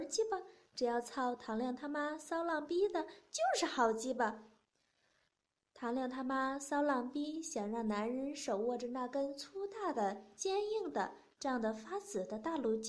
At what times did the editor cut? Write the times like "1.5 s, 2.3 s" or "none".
none